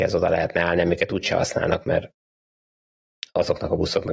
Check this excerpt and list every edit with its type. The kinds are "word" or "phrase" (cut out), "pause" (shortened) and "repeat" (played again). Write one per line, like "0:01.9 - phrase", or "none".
none